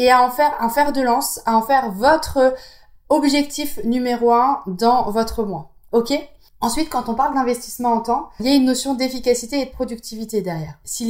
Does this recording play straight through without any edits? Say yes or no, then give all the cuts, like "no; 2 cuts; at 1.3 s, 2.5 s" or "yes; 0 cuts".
yes; 0 cuts